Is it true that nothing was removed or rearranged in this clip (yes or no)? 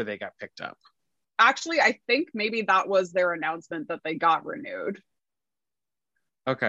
yes